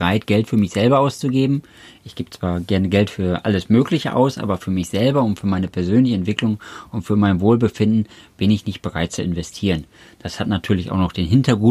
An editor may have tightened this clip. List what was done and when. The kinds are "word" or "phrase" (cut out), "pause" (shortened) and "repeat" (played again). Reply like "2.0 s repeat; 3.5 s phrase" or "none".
none